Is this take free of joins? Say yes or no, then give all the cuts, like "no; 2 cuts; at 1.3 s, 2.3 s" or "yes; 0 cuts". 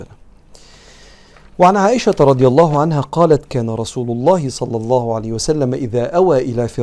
yes; 0 cuts